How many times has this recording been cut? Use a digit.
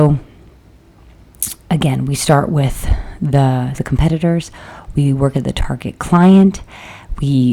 2